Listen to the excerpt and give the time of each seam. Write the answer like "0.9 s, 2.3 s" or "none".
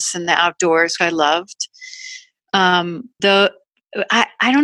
1.0 s, 3.2 s